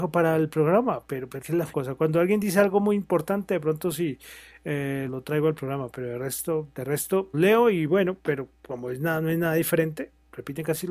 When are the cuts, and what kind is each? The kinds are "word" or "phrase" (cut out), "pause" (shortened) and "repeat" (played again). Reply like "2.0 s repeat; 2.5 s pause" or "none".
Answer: 1.4 s word; 1.7 s phrase; 5.1 s word; 7.3 s phrase